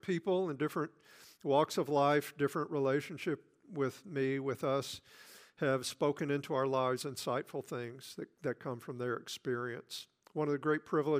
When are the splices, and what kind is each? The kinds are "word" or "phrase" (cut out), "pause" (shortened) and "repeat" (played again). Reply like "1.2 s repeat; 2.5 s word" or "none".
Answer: none